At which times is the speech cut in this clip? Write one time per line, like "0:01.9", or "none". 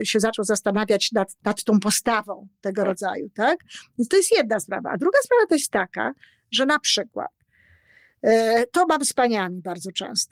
0:01.4